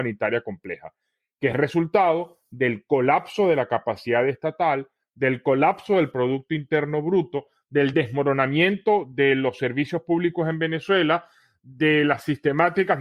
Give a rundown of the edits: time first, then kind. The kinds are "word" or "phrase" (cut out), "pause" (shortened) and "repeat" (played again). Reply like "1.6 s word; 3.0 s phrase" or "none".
none